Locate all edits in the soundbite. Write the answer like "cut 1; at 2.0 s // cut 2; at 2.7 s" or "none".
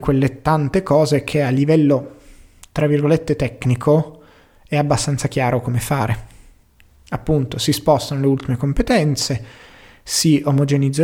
none

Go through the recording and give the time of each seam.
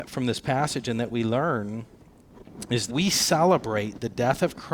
cut 1; at 2.9 s

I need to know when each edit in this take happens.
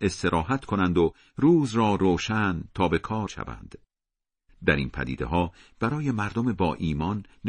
cut 1; at 3.3 s

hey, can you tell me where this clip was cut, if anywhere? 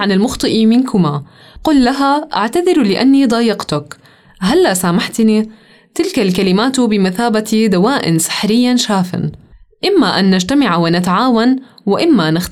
none

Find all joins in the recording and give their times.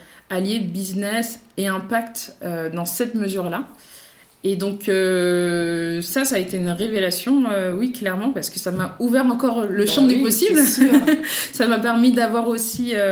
none

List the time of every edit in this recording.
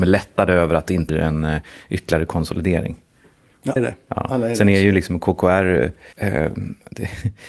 cut 1; at 1.1 s // cut 2; at 3.8 s // cut 3; at 6.1 s

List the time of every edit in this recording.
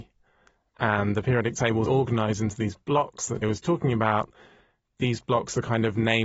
cut 1; at 1.9 s // cut 2; at 3.4 s

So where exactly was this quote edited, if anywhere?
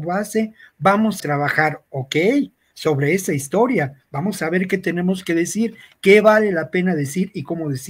cut 1; at 1.2 s

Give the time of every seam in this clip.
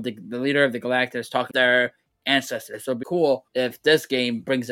cut 1; at 1.5 s // cut 2; at 3.0 s // cut 3; at 3.5 s

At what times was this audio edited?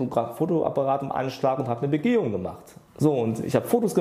cut 1; at 2.9 s

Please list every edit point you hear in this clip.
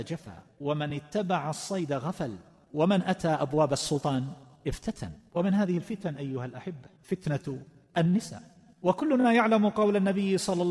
none

